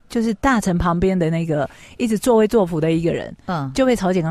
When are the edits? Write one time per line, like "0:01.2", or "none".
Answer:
none